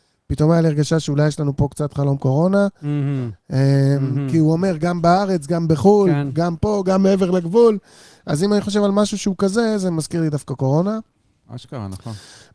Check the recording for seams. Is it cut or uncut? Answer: uncut